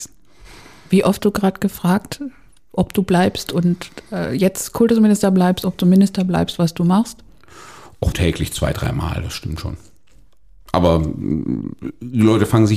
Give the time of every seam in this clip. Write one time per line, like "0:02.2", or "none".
0:01.2
0:08.1

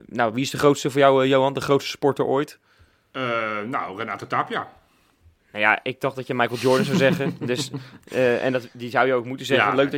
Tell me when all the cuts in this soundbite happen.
none

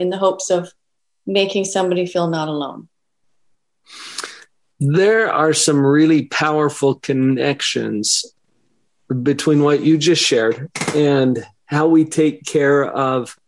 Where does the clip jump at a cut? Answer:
none

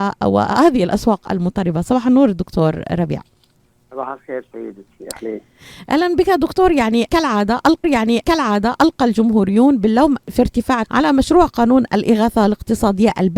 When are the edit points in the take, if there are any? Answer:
0:03.6
0:07.8
0:10.8

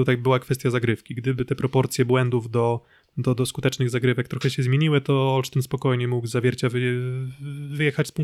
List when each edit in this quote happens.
none

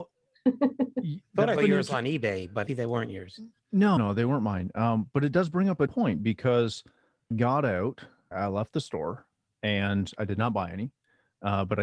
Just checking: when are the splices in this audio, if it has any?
0:01.6
0:02.7
0:04.0
0:05.9
0:07.3
0:08.3

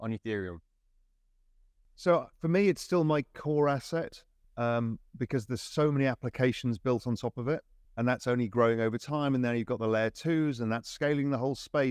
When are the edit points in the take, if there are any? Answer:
0:02.3
0:04.4
0:07.8

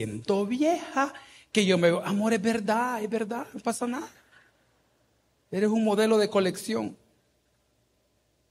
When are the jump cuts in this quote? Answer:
none

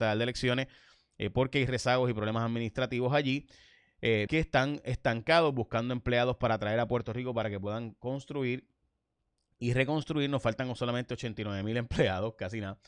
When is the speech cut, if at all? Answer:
0:04.3

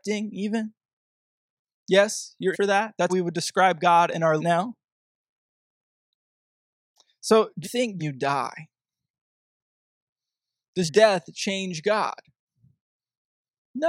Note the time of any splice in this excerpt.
0:02.5
0:03.1
0:04.4
0:07.6
0:08.0
0:10.9

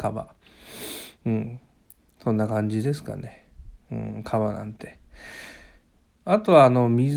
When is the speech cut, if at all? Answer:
none

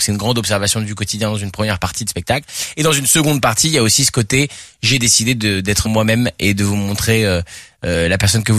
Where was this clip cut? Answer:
0:05.8

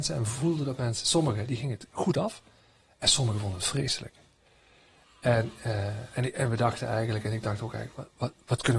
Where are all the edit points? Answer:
none

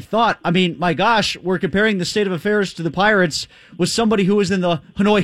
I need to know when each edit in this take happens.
none

